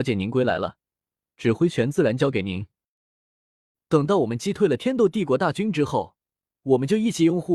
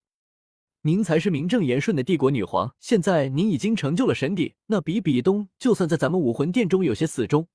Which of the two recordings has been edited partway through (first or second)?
second